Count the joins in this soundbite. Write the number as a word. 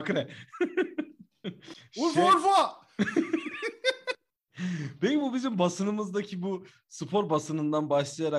zero